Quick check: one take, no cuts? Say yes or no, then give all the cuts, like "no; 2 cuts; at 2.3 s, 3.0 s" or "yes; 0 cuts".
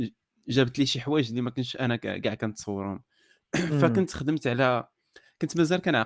yes; 0 cuts